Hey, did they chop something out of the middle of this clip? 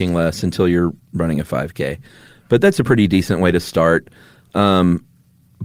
no; 0 cuts

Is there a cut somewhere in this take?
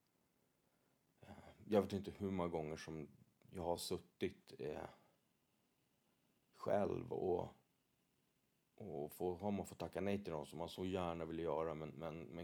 no; 0 cuts

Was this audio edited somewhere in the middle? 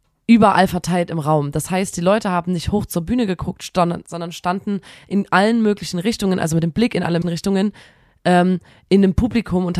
yes; 1 cut; at 7.2 s

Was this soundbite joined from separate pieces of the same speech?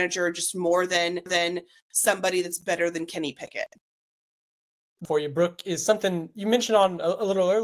yes; 2 cuts; at 1.3 s, 5.0 s

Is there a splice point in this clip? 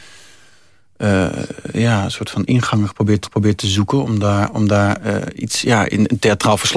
yes; 1 cut; at 3.2 s

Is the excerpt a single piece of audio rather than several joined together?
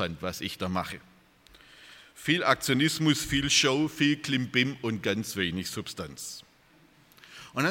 yes; 0 cuts

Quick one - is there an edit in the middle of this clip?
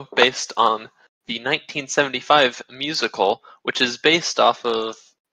no; 0 cuts

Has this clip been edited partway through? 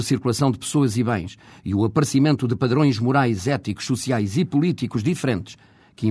no; 0 cuts

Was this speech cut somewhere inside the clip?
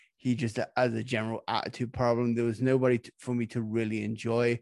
no; 0 cuts

